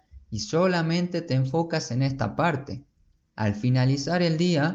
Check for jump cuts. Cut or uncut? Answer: uncut